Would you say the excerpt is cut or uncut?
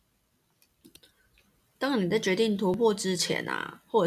uncut